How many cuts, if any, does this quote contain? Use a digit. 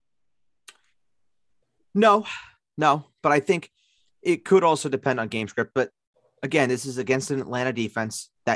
0